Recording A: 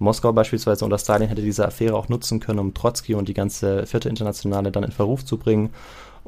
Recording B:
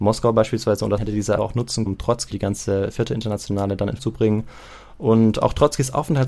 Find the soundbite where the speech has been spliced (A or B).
B